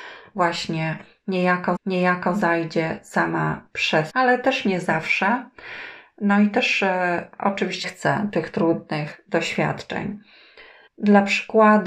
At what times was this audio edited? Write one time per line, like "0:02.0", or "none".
0:01.8
0:04.1
0:07.8
0:10.9